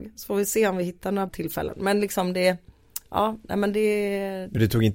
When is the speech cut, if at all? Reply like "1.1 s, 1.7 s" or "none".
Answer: 1.3 s